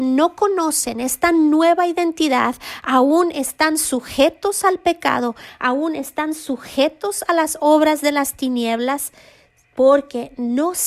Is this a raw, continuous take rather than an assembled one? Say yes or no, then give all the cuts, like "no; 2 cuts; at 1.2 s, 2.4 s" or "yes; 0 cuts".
yes; 0 cuts